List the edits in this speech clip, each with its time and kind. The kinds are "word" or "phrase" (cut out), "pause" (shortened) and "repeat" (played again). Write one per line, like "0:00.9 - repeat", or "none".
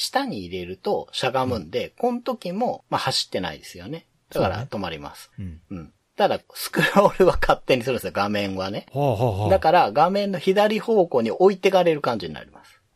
none